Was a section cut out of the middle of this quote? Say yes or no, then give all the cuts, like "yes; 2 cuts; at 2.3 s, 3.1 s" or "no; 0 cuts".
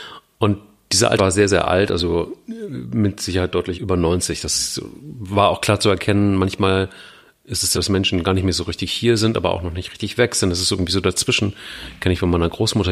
yes; 3 cuts; at 1.2 s, 3.7 s, 7.7 s